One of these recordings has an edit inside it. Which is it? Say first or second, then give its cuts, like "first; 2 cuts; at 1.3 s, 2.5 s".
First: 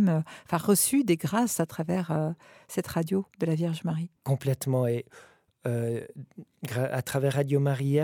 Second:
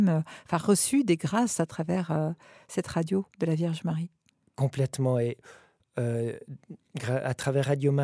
first; 1 cut; at 4.2 s